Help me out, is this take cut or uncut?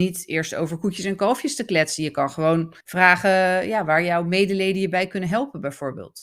cut